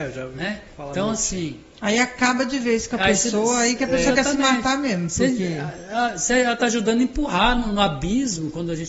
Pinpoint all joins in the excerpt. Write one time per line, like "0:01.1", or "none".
none